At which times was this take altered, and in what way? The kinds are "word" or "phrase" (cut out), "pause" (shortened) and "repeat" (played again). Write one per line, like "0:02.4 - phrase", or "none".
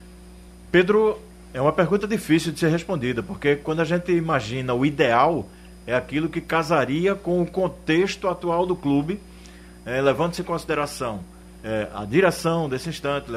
none